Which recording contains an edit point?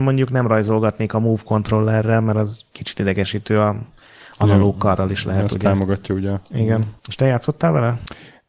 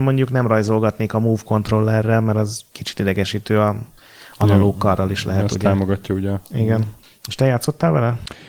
first; 1 cut; at 7.0 s

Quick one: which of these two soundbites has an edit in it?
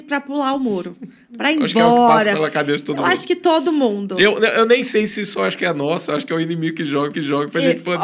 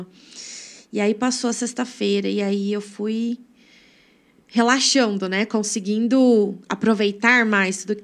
first; 1 cut; at 7.1 s

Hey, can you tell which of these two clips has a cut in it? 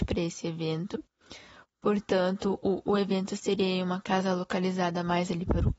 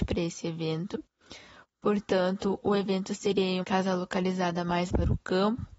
second; 3 cuts; at 2.6 s, 3.6 s, 4.9 s

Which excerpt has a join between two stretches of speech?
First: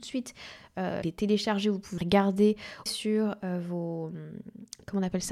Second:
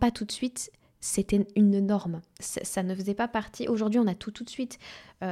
first; 3 cuts; at 1.0 s, 2.0 s, 2.9 s

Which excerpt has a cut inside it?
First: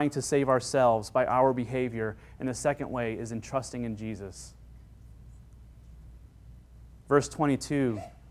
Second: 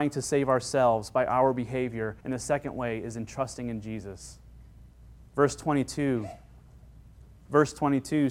second; 2 cuts; at 2.2 s, 4.8 s

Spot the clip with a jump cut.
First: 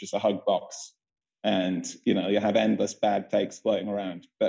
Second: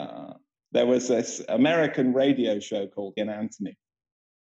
second; 2 cuts; at 1.5 s, 3.2 s

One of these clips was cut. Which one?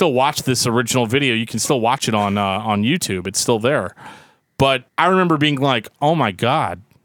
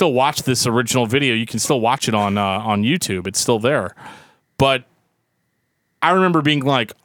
first; 1 cut; at 4.9 s

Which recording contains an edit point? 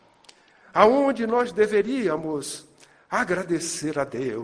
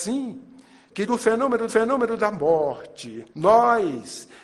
second; 3 cuts; at 1.1 s, 1.7 s, 3.3 s

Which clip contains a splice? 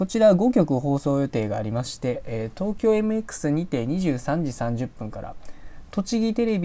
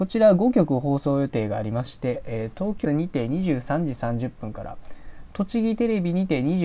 second; 1 cut; at 2.8 s

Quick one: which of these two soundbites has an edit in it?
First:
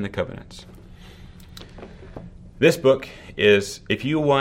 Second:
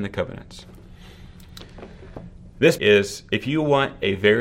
second; 1 cut; at 2.8 s

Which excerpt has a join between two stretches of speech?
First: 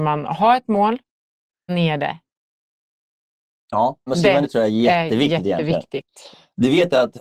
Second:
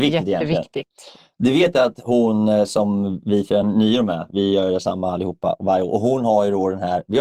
first; 3 cuts; at 1.7 s, 4.1 s, 4.4 s

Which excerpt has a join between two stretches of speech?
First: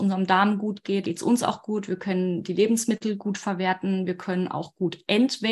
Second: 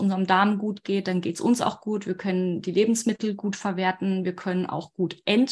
first; 1 cut; at 1.0 s

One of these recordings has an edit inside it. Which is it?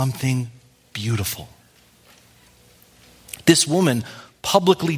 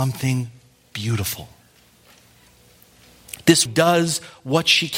second; 1 cut; at 3.7 s

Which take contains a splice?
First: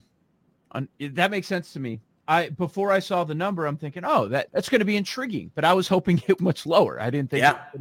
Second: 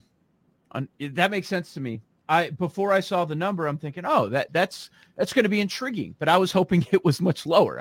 first; 2 cuts; at 4.5 s, 6.4 s

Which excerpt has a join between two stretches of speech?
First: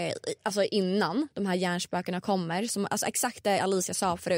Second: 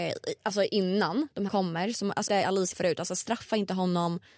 second; 3 cuts; at 1.5 s, 2.3 s, 2.7 s

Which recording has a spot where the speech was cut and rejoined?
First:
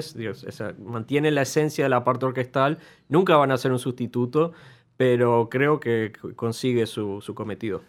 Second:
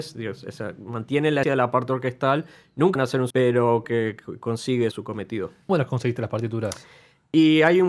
second; 6 cuts; at 1.4 s, 3.0 s, 3.3 s, 3.8 s, 4.9 s, 5.7 s

